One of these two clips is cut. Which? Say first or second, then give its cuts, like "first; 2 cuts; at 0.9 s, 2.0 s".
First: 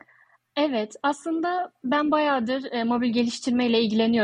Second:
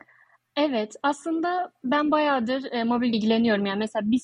second; 1 cut; at 3.1 s